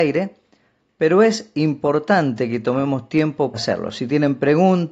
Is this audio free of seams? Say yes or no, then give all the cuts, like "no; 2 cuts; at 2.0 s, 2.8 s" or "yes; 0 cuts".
no; 1 cut; at 3.5 s